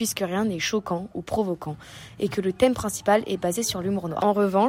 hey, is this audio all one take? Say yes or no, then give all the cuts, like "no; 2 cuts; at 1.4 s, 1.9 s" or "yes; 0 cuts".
yes; 0 cuts